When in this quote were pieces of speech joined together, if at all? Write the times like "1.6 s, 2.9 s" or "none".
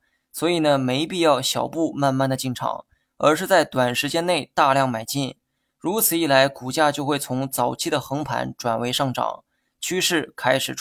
none